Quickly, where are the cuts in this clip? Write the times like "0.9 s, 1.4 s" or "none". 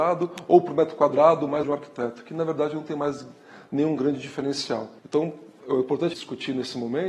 1.6 s, 5.0 s, 6.1 s